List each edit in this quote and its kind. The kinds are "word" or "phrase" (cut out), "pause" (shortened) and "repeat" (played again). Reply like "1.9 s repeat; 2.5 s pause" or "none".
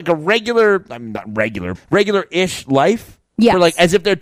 1.7 s word